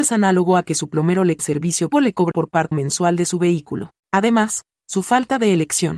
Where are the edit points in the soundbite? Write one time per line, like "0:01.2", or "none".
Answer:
0:01.4
0:01.9
0:02.3
0:02.7
0:04.0